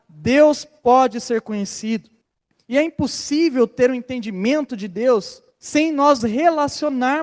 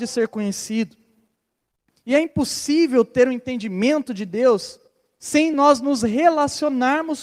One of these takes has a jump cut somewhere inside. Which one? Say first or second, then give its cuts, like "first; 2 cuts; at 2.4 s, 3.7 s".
first; 3 cuts; at 2.2 s, 5.5 s, 6.2 s